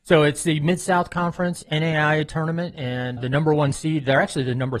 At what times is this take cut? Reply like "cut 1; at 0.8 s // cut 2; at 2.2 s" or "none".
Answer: cut 1; at 3.2 s